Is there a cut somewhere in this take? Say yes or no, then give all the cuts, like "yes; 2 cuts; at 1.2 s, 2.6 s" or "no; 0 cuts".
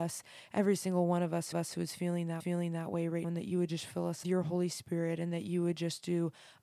yes; 4 cuts; at 1.5 s, 2.4 s, 3.2 s, 4.2 s